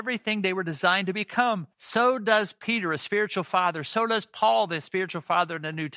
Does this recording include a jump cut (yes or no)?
yes